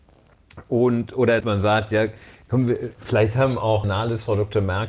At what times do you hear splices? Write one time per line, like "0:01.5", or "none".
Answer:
0:01.4
0:03.0
0:03.8